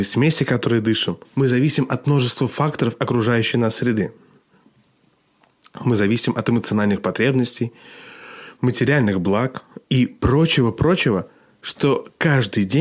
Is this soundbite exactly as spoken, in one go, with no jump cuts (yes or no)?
no